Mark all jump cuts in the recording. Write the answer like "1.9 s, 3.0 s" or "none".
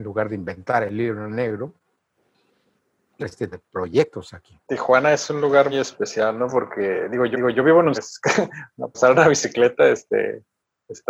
3.2 s, 3.5 s, 4.6 s, 5.7 s, 7.3 s, 7.9 s, 8.9 s